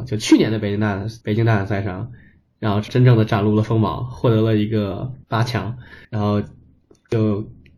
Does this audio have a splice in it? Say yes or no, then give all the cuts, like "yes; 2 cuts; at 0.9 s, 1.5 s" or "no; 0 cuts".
yes; 4 cuts; at 1.2 s, 2.9 s, 5.2 s, 6.0 s